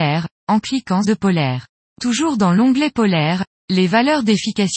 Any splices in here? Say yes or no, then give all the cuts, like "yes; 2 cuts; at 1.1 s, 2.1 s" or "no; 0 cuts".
yes; 2 cuts; at 1.0 s, 1.7 s